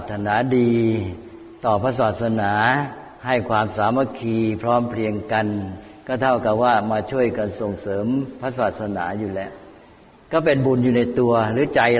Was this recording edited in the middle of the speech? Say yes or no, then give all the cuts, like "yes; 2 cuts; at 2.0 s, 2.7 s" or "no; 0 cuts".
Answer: yes; 1 cut; at 3.1 s